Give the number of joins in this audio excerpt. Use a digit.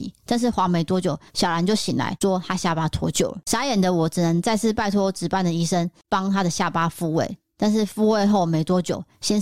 1